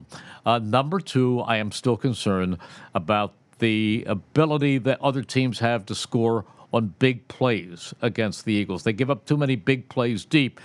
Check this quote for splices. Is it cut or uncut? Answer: uncut